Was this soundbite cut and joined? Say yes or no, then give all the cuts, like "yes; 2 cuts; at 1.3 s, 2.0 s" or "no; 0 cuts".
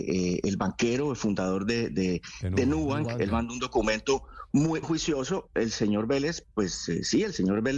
yes; 1 cut; at 4.8 s